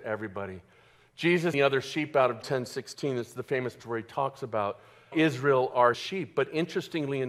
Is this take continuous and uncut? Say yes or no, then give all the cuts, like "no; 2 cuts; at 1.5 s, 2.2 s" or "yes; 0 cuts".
no; 5 cuts; at 1.5 s, 2.4 s, 3.8 s, 5.1 s, 5.9 s